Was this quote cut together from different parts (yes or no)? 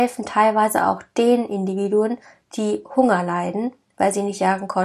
no